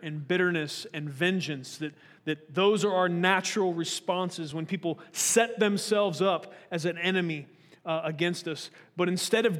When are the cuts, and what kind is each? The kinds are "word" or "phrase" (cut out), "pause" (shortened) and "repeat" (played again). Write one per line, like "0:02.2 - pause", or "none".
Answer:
none